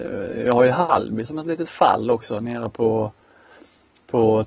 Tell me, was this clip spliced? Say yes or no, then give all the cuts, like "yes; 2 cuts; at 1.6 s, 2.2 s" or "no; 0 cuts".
no; 0 cuts